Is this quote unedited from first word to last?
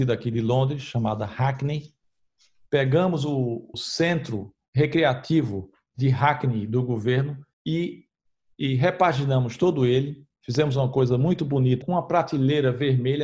no; 3 cuts; at 3.7 s, 7.5 s, 11.8 s

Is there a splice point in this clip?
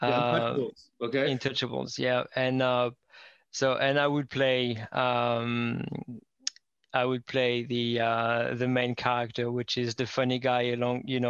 no; 0 cuts

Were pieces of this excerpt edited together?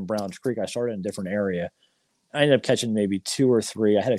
no; 0 cuts

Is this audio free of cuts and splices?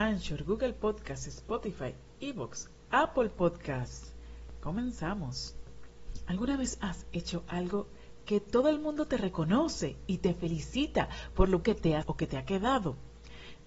no; 2 cuts; at 11.6 s, 12.0 s

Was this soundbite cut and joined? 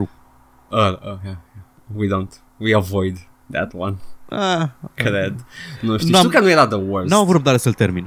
no; 0 cuts

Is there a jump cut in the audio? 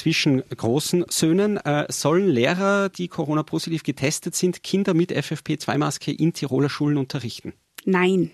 no; 0 cuts

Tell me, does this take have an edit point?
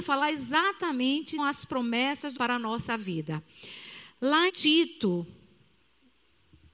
yes; 3 cuts; at 1.4 s, 2.4 s, 4.5 s

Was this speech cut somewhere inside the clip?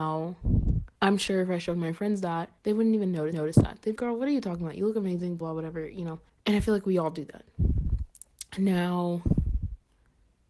yes; 6 cuts; at 1.0 s, 2.6 s, 3.3 s, 4.0 s, 5.4 s, 6.3 s

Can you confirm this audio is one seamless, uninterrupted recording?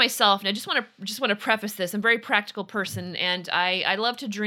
yes; 0 cuts

